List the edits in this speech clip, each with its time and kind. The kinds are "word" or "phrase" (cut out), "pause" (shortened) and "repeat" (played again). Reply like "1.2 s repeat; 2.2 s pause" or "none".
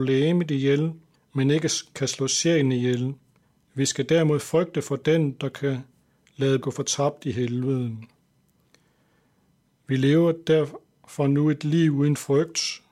1.1 s pause; 3.4 s pause; 6.6 s phrase